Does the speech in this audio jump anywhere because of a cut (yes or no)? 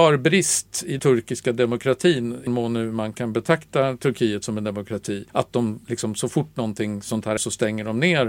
yes